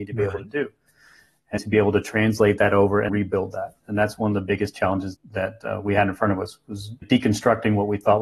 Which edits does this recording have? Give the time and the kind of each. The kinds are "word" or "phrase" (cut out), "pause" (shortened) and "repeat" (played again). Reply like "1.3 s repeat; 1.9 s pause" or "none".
1.6 s word; 3.1 s word; 5.1 s word; 7.0 s word

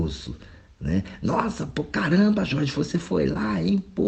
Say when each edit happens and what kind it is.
none

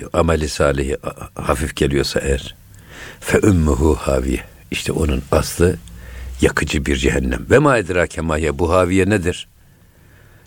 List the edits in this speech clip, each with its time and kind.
none

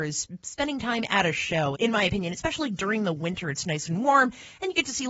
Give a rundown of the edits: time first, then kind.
1.7 s word

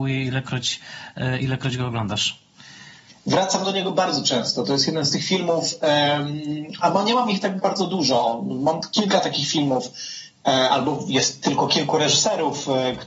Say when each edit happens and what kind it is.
none

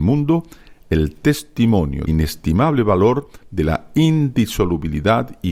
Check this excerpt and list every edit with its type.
2.1 s word

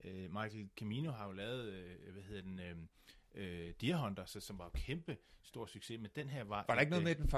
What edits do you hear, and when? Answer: none

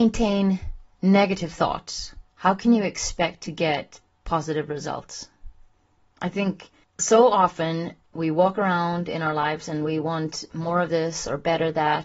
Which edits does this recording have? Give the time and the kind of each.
2.3 s pause; 5.7 s pause; 6.8 s pause

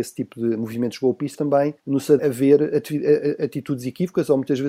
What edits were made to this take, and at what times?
1.3 s word; 1.8 s pause; 2.2 s phrase

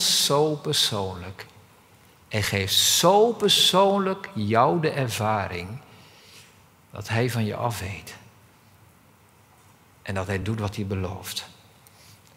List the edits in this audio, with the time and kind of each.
none

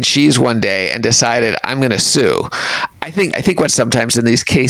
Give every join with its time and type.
3.3 s word; 3.7 s word

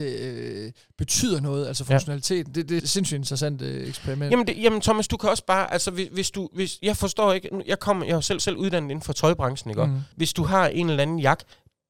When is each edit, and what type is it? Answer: 2.8 s word; 8.4 s repeat; 10.1 s pause

